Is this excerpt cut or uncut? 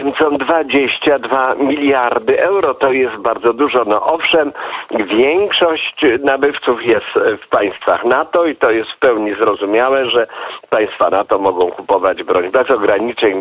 cut